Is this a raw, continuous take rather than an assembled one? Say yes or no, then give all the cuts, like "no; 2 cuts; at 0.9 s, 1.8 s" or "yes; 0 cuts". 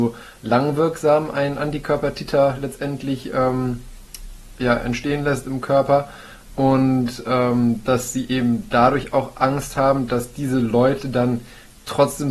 yes; 0 cuts